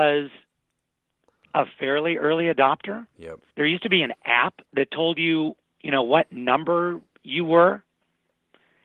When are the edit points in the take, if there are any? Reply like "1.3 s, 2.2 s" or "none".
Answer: 3.5 s, 4.7 s